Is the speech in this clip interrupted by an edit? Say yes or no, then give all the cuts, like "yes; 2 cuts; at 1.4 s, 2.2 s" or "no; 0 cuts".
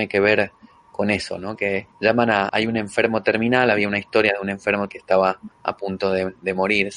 yes; 4 cuts; at 1.9 s, 2.5 s, 4.9 s, 5.5 s